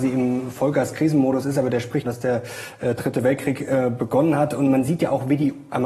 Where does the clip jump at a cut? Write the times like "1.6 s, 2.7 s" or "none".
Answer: 2.0 s